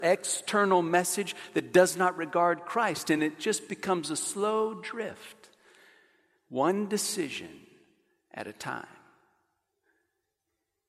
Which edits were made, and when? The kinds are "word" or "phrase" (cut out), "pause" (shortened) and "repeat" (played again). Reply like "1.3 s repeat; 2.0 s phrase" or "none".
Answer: none